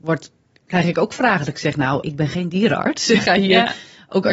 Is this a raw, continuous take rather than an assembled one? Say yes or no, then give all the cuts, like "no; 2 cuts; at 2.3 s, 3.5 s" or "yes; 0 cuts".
no; 2 cuts; at 2.0 s, 3.2 s